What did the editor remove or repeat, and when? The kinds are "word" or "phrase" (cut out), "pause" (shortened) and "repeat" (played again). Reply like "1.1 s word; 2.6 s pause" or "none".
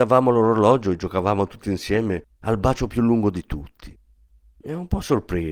none